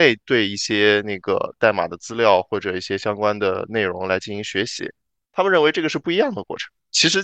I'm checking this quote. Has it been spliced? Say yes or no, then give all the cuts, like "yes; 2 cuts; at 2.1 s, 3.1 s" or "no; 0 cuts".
no; 0 cuts